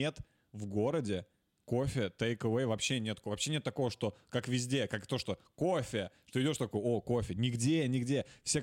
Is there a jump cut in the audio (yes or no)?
no